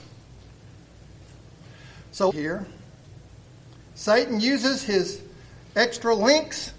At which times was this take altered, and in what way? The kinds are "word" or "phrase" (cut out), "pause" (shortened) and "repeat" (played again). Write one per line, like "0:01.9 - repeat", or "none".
0:02.3 - phrase